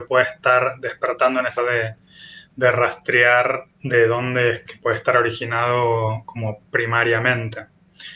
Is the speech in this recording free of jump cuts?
no; 3 cuts; at 1.6 s, 3.7 s, 4.7 s

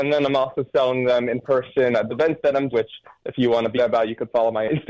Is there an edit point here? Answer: yes; 3 cuts; at 2.1 s, 2.7 s, 3.8 s

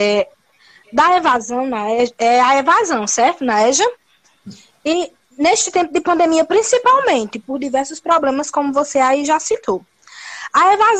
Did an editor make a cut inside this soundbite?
no; 0 cuts

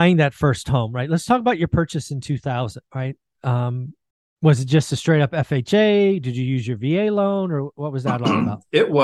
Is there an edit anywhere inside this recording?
yes; 2 cuts; at 2.9 s, 4.1 s

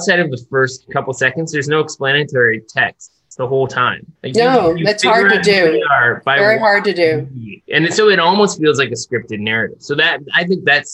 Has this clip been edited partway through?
yes; 2 cuts; at 4.2 s, 7.6 s

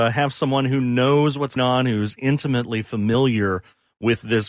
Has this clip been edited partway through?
yes; 1 cut; at 1.6 s

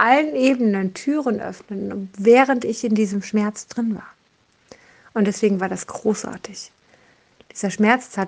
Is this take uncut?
yes; 0 cuts

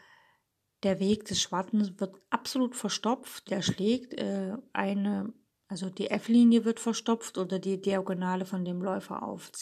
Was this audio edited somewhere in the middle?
yes; 2 cuts; at 3.5 s, 5.5 s

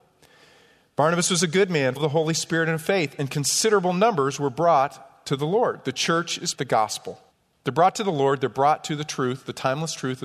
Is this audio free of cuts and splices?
no; 3 cuts; at 2.0 s, 6.5 s, 7.3 s

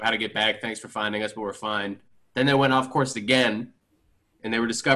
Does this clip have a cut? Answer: no; 0 cuts

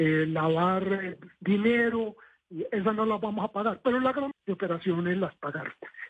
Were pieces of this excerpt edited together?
yes; 1 cut; at 4.3 s

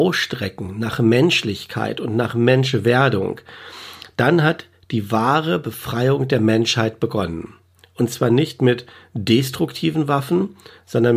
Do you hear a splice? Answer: no; 0 cuts

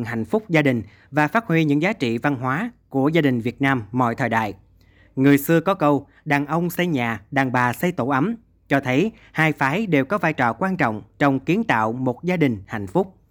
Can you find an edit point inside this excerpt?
no; 0 cuts

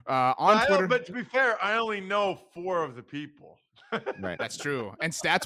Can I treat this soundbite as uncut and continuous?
yes; 0 cuts

